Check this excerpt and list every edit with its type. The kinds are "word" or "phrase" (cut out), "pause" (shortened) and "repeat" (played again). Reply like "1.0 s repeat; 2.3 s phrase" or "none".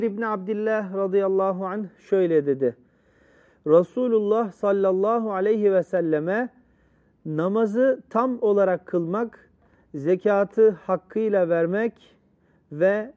none